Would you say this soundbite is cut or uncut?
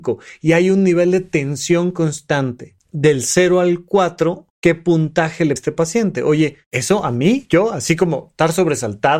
cut